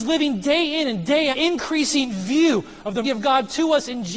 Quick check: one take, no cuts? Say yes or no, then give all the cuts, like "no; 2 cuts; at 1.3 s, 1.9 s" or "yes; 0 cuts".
no; 2 cuts; at 1.3 s, 3.0 s